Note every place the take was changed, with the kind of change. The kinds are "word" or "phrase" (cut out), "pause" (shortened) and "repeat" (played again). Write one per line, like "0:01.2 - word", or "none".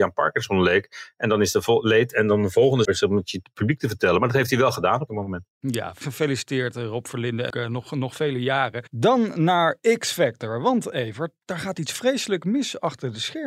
0:02.9 - word
0:05.1 - word
0:06.0 - word
0:07.5 - word